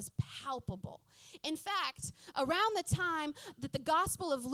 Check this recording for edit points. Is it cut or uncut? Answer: uncut